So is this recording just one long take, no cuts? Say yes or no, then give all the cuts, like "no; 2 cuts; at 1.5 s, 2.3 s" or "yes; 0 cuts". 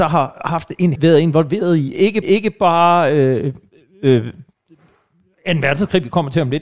no; 2 cuts; at 0.9 s, 2.2 s